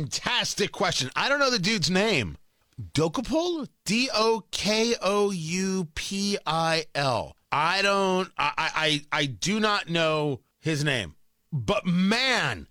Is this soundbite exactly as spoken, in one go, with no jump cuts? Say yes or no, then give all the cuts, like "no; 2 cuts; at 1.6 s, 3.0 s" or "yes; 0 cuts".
no; 3 cuts; at 2.6 s, 7.4 s, 10.5 s